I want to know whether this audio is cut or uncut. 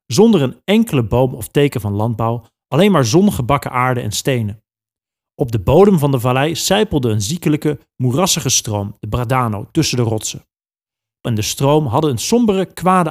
cut